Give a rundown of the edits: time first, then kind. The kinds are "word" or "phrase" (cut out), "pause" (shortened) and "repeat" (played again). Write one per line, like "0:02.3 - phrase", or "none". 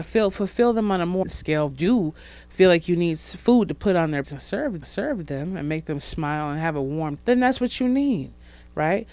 0:01.2 - word
0:01.7 - phrase
0:04.2 - word
0:04.8 - repeat
0:07.2 - word